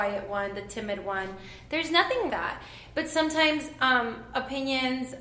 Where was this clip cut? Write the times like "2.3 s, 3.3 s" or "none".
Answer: 2.3 s